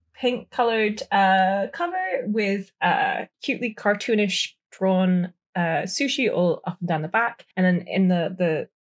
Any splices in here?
yes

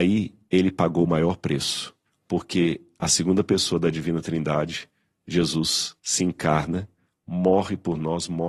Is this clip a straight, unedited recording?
no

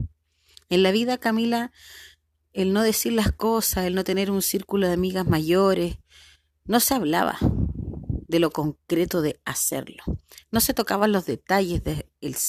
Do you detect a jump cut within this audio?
no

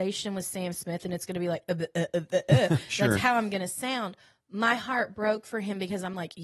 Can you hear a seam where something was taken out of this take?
no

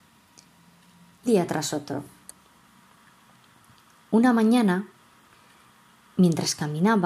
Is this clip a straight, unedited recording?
no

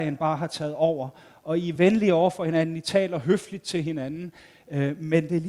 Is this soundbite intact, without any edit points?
yes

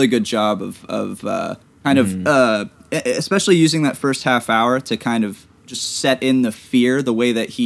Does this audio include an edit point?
yes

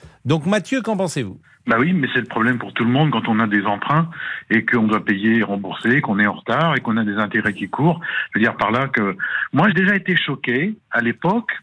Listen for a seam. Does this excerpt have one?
yes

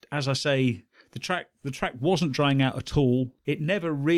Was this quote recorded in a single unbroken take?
yes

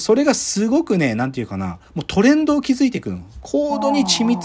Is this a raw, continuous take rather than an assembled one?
no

